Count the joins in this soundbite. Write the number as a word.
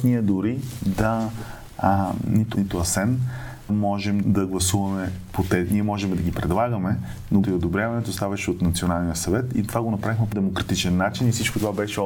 five